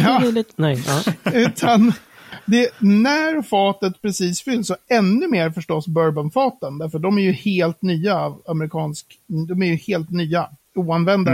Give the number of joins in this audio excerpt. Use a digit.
0